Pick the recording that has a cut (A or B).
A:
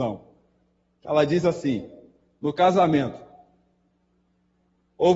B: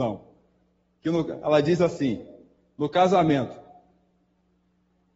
A